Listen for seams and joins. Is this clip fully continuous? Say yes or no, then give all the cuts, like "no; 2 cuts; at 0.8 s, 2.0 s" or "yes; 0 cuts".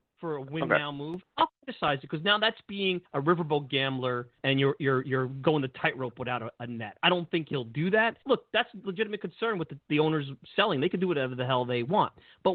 no; 3 cuts; at 3.0 s, 4.4 s, 8.2 s